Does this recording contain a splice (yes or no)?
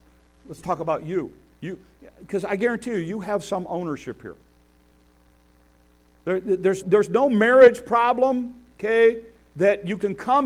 yes